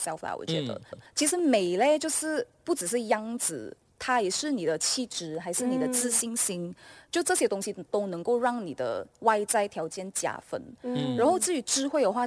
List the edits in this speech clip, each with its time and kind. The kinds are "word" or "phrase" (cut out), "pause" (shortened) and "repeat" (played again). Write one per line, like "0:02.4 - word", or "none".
0:00.9 - repeat